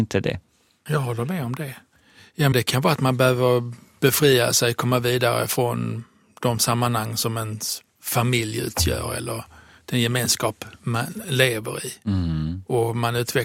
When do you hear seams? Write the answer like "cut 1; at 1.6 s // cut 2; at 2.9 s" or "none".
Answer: cut 1; at 2.5 s

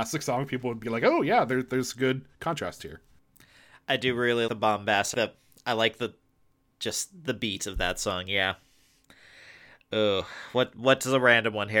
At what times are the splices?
cut 1; at 4.5 s // cut 2; at 5.1 s

